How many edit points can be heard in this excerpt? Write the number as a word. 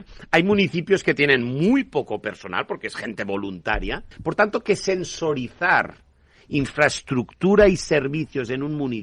one